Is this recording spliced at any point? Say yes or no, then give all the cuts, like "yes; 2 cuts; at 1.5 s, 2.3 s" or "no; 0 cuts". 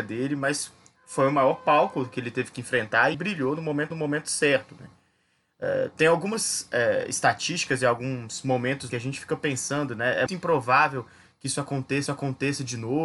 yes; 5 cuts; at 3.1 s, 3.9 s, 8.9 s, 10.3 s, 12.1 s